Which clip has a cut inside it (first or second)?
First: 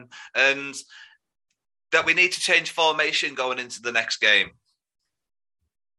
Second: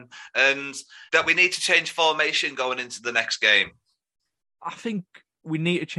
second